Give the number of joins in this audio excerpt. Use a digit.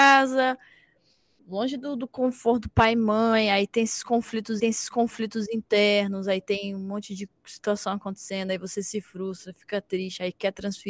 1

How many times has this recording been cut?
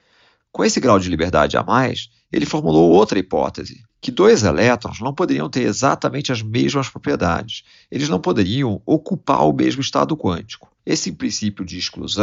2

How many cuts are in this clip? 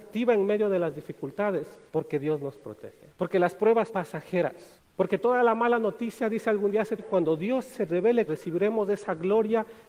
6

